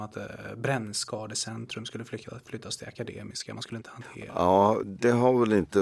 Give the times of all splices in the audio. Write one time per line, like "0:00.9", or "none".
0:04.8